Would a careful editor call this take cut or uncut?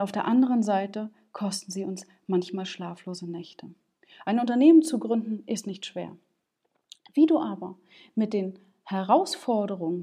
uncut